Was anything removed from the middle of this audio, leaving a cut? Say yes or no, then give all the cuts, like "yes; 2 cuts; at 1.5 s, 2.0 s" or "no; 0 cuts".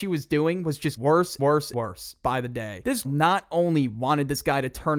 yes; 4 cuts; at 1.0 s, 1.4 s, 1.7 s, 3.0 s